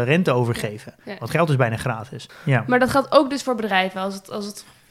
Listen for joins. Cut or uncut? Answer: uncut